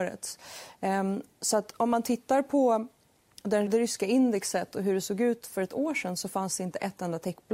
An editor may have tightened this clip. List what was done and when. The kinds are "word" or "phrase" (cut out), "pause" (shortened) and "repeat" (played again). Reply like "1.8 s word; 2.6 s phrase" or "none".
3.7 s word